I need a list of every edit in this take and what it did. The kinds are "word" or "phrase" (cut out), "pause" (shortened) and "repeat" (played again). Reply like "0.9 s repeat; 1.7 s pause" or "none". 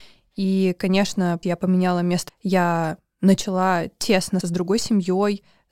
1.4 s word; 2.3 s word; 4.4 s word